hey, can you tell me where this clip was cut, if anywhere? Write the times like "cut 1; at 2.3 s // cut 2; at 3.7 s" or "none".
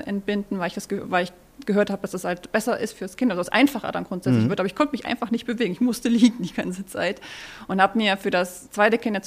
none